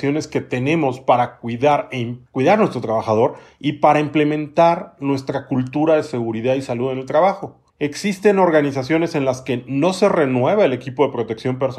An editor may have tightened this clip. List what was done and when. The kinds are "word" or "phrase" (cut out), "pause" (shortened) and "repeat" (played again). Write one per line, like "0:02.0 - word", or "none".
0:02.3 - pause
0:07.7 - pause